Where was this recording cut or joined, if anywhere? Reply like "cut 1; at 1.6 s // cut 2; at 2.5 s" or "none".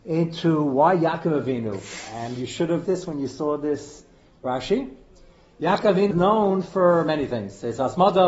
cut 1; at 2.8 s // cut 2; at 6.1 s